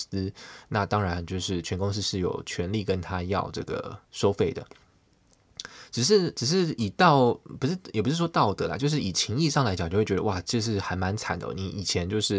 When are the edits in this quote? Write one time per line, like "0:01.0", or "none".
0:04.0